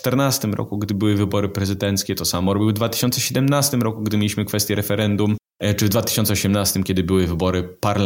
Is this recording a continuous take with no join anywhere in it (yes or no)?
yes